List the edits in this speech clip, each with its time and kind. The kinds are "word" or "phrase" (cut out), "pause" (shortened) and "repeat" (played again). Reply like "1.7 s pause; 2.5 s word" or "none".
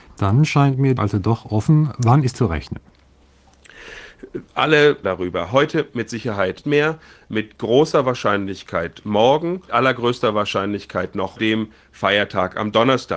1.0 s word; 2.3 s word; 5.0 s word; 6.6 s word; 9.7 s word; 11.4 s word